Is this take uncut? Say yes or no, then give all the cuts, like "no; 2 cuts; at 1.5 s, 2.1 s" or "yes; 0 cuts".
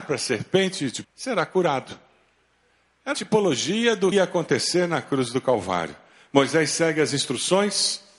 no; 3 cuts; at 1.0 s, 3.1 s, 4.1 s